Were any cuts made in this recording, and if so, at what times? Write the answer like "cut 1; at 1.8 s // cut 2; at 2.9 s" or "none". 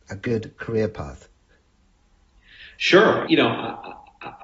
cut 1; at 3.3 s